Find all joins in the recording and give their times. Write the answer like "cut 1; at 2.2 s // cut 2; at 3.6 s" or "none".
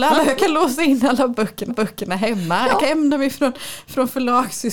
cut 1; at 1.7 s // cut 2; at 2.8 s

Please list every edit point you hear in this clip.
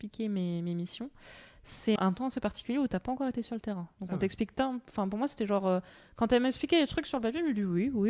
cut 1; at 2.0 s

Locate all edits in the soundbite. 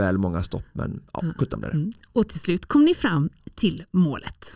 cut 1; at 1.4 s

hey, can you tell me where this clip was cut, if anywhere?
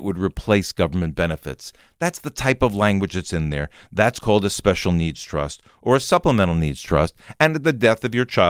none

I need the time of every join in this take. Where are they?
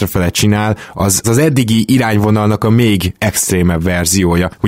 cut 1; at 1.2 s

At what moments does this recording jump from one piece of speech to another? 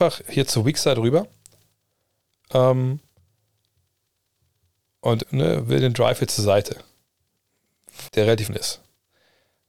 cut 1; at 5.2 s // cut 2; at 8.1 s // cut 3; at 8.5 s

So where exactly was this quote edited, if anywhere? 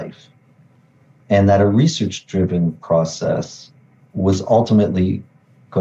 none

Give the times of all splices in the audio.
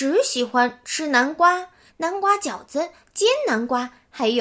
cut 1; at 1.9 s

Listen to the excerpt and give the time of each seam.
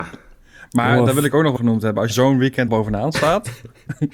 cut 1; at 1.6 s // cut 2; at 2.1 s // cut 3; at 2.7 s

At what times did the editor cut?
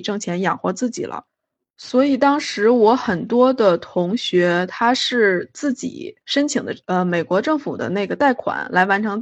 cut 1; at 6.2 s // cut 2; at 6.8 s

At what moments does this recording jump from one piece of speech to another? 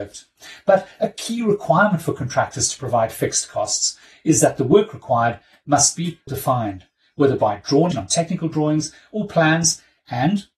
cut 1; at 6.3 s // cut 2; at 7.9 s

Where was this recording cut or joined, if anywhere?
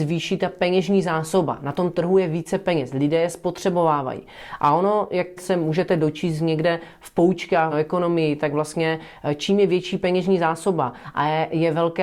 cut 1; at 5.4 s // cut 2; at 7.7 s

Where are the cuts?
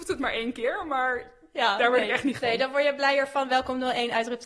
cut 1; at 2.4 s

